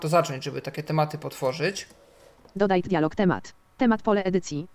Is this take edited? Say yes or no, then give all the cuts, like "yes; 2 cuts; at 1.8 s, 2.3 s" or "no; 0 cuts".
yes; 1 cut; at 2.8 s